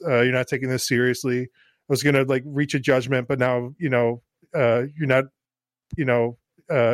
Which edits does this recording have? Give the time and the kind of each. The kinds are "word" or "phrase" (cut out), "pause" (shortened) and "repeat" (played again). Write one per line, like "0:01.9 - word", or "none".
0:06.0 - repeat